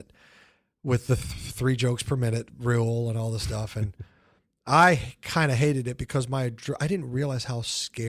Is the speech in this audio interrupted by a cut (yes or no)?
no